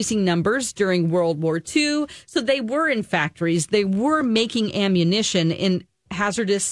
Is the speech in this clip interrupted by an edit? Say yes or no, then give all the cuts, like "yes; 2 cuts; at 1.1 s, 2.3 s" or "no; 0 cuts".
no; 0 cuts